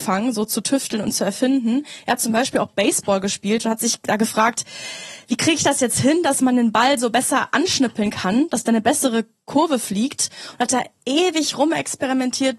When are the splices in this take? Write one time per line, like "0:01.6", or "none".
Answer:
none